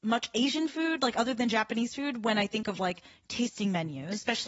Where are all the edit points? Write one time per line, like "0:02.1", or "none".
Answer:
none